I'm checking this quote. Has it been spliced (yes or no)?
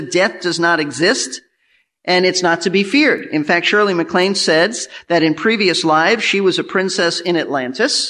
no